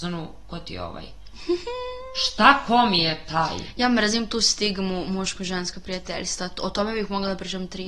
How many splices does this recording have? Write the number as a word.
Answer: zero